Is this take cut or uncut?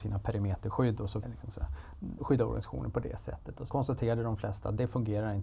cut